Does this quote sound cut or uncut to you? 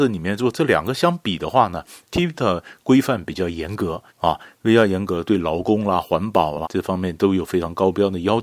cut